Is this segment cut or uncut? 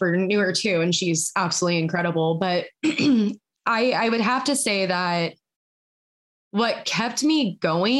uncut